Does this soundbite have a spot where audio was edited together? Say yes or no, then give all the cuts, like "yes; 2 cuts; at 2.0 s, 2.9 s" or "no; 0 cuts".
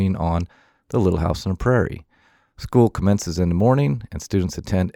no; 0 cuts